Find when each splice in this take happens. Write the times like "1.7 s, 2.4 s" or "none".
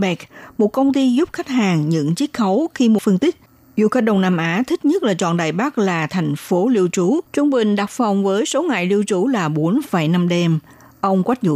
3.0 s, 7.3 s